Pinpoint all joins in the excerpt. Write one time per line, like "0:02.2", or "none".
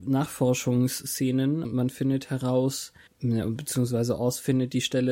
0:01.6
0:03.1